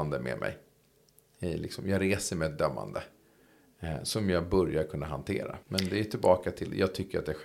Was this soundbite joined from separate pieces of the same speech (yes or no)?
yes